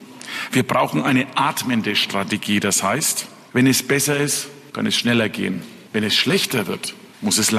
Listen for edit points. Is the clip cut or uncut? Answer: uncut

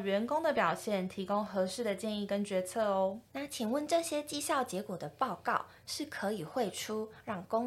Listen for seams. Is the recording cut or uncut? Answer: cut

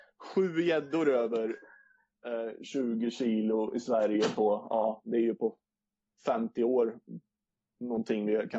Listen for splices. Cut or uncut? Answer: uncut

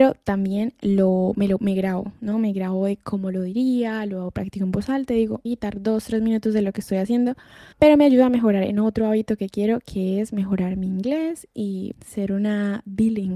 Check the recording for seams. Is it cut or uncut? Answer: cut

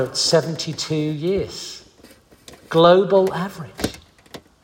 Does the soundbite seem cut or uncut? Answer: uncut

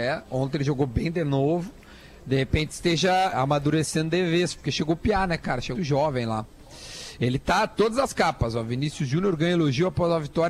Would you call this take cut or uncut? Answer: cut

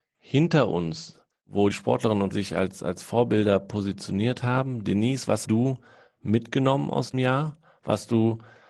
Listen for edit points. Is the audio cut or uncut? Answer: cut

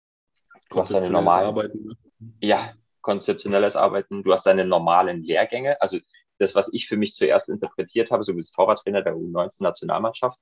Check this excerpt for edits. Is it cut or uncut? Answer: uncut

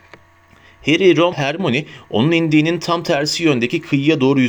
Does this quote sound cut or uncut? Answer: cut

